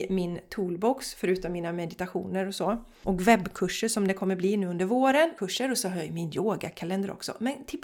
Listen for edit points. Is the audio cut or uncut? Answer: uncut